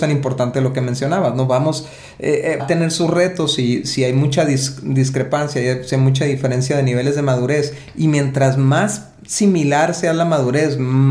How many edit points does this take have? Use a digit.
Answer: 1